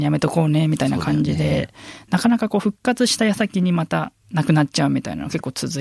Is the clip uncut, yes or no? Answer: no